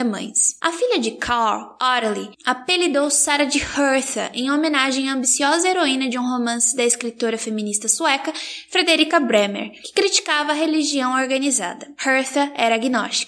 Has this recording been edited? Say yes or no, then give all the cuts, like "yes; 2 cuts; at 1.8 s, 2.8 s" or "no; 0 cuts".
no; 0 cuts